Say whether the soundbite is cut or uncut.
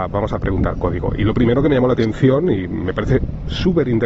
uncut